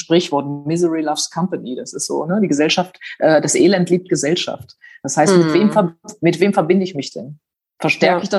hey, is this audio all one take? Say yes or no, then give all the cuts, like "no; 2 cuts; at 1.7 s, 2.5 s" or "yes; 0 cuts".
yes; 0 cuts